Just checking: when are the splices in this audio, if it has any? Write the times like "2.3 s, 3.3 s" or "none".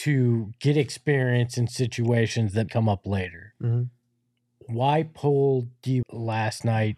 2.7 s, 6.0 s